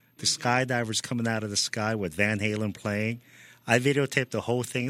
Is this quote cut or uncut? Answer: uncut